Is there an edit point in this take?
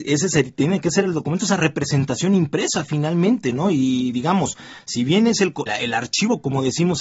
yes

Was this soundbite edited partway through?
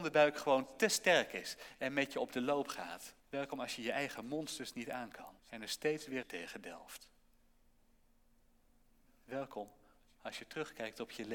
yes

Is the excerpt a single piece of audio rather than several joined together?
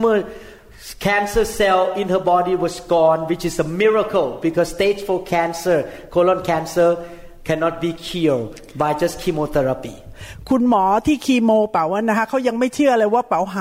yes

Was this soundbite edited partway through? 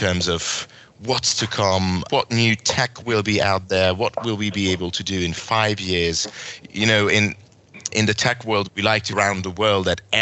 yes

